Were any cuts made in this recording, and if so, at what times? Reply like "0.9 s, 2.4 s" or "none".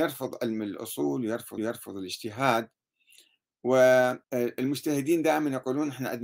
1.6 s, 4.2 s